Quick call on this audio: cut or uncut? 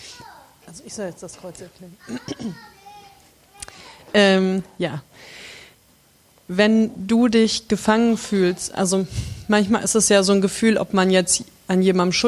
uncut